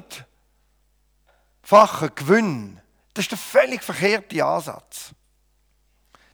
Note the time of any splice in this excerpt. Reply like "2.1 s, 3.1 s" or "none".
3.0 s